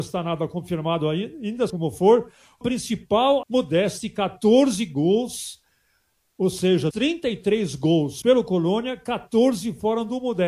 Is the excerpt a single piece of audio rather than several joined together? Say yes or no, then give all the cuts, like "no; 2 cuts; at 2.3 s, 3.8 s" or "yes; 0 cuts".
no; 5 cuts; at 1.7 s, 2.6 s, 3.4 s, 6.9 s, 8.2 s